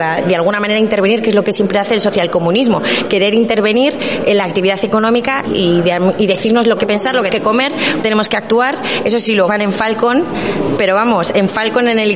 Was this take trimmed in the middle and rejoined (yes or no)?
yes